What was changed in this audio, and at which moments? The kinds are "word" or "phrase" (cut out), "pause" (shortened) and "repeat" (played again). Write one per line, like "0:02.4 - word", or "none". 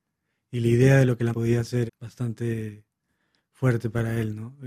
0:01.3 - word
0:01.9 - word